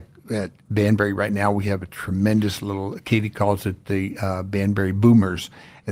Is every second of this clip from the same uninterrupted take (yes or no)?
yes